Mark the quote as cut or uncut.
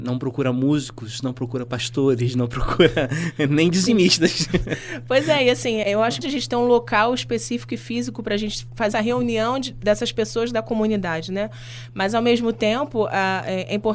cut